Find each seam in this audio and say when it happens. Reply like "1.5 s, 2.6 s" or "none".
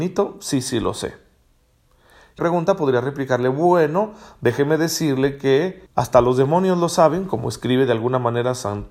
2.4 s, 5.9 s